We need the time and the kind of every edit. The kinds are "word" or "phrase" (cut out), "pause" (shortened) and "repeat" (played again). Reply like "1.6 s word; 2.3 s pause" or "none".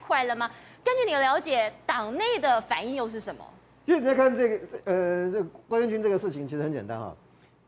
none